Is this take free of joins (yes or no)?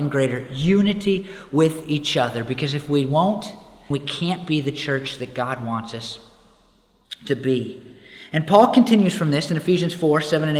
no